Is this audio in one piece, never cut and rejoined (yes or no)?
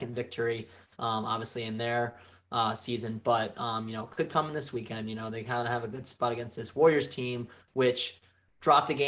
yes